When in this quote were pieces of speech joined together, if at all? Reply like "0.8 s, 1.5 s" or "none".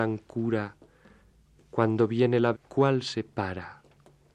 2.5 s